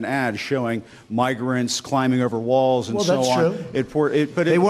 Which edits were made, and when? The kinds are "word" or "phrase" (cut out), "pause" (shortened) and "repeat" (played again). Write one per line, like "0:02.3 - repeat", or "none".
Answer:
none